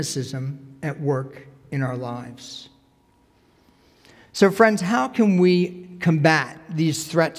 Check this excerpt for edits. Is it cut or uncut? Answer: uncut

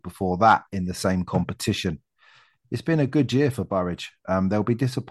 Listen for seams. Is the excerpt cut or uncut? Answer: uncut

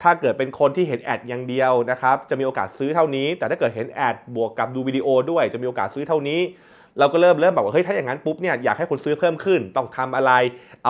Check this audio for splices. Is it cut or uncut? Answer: uncut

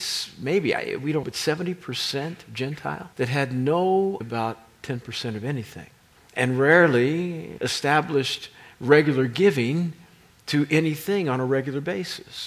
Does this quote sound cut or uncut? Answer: cut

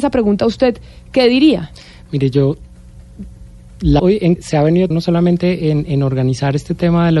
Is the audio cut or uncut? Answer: cut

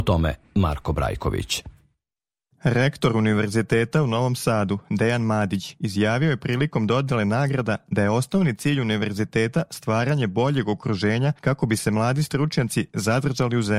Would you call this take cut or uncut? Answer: uncut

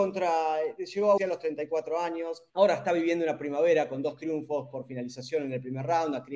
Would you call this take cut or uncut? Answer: cut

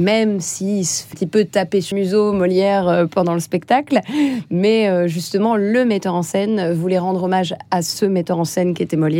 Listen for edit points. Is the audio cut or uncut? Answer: cut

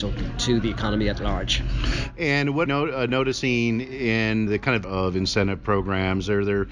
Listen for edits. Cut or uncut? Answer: cut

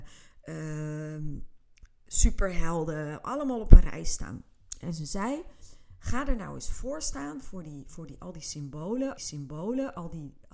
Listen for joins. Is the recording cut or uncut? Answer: cut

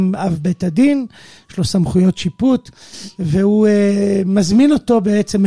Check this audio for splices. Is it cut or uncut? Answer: uncut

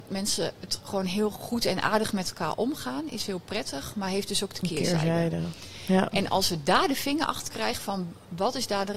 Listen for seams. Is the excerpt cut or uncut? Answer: uncut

